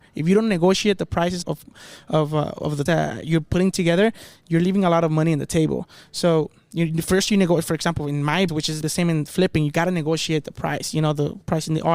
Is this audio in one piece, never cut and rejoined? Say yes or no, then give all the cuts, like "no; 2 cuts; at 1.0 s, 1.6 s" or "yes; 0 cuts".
no; 4 cuts; at 1.4 s, 2.9 s, 8.5 s, 8.8 s